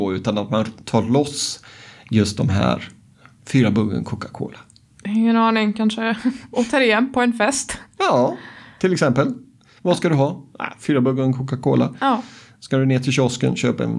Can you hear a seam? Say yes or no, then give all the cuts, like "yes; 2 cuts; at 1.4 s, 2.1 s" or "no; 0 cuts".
no; 0 cuts